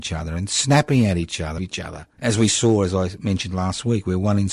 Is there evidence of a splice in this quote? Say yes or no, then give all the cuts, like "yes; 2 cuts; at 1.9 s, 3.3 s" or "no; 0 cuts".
yes; 2 cuts; at 1.6 s, 2.1 s